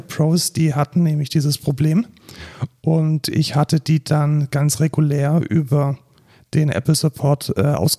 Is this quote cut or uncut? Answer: uncut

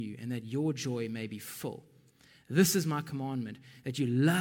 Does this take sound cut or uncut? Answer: uncut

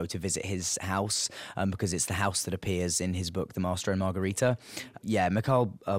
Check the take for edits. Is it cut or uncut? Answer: uncut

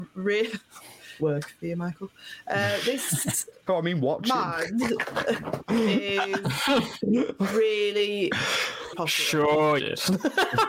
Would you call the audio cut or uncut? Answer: cut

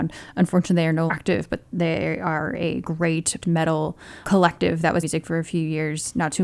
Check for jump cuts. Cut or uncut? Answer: cut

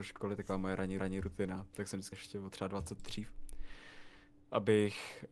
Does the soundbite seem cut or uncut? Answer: cut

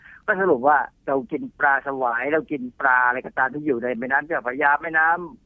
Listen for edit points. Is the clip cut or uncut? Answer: cut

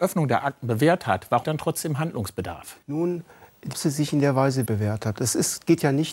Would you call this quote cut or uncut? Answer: cut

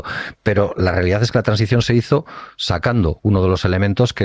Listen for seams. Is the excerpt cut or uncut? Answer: uncut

